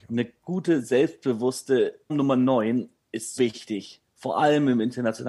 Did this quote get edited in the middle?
yes; 2 cuts; at 2.1 s, 3.4 s

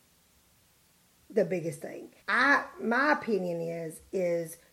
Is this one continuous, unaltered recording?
no; 1 cut; at 2.2 s

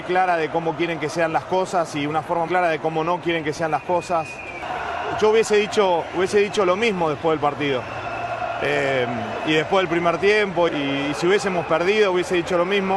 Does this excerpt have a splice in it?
yes; 2 cuts; at 2.5 s, 10.7 s

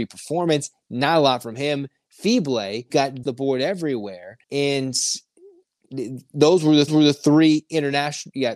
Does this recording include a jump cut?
yes; 4 cuts; at 2.9 s, 3.2 s, 4.4 s, 6.9 s

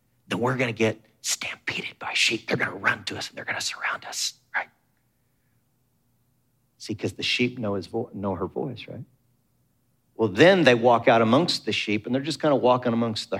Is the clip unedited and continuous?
yes; 0 cuts

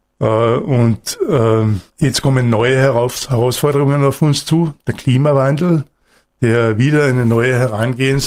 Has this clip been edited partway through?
yes; 1 cut; at 1.9 s

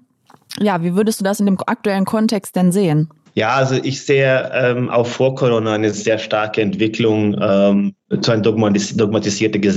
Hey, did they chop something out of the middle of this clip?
yes; 1 cut; at 3.3 s

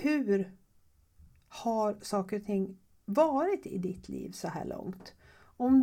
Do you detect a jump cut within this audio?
no; 0 cuts

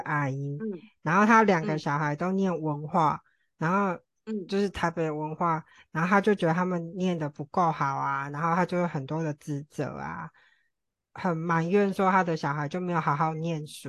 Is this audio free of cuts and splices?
yes; 0 cuts

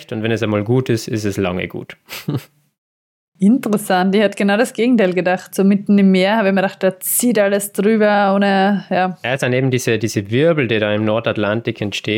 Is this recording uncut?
yes; 0 cuts

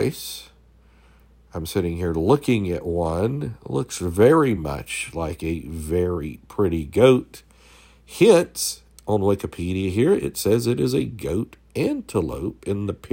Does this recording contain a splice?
no; 0 cuts

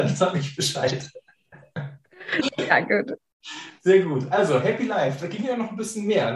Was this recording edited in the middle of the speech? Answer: yes; 1 cut; at 3.8 s

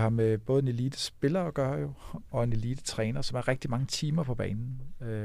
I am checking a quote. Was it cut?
no; 0 cuts

